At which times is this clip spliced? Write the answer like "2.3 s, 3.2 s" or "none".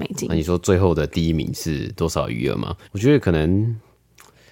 2.8 s

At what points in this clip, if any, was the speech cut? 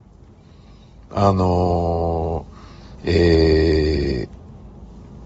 3.0 s

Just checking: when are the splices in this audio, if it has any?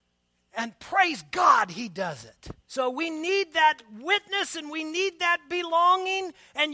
2.6 s

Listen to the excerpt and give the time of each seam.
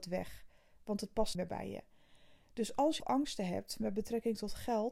1.3 s, 3.0 s

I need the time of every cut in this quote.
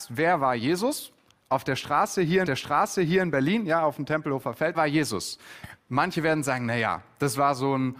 2.4 s, 4.7 s

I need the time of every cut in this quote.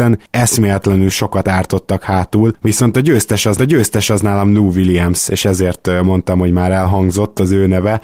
3.6 s

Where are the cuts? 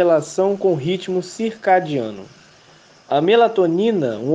none

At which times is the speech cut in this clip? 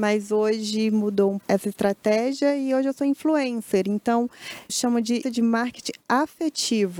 1.4 s, 4.7 s, 5.2 s

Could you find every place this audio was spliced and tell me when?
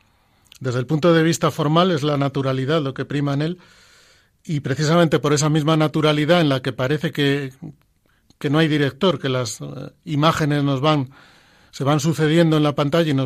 none

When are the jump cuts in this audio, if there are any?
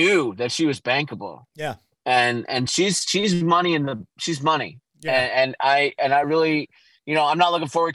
none

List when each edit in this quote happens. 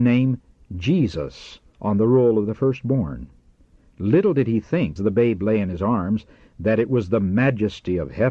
5.0 s

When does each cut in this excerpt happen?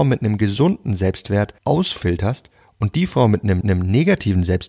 1.6 s, 3.6 s

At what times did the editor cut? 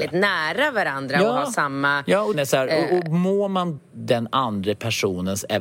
2.3 s, 3.8 s

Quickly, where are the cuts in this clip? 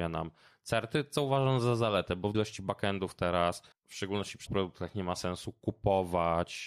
2.3 s, 3.7 s, 4.5 s

